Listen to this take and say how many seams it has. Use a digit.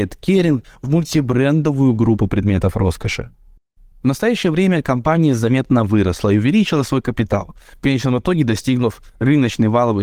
0